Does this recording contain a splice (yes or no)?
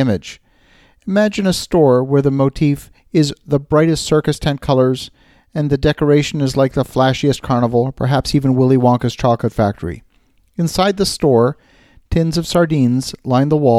no